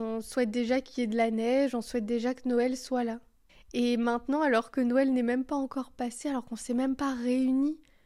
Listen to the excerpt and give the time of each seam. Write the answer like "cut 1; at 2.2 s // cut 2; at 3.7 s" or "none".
cut 1; at 3.5 s